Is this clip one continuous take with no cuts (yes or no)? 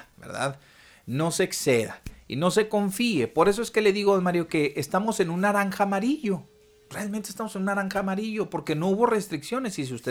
yes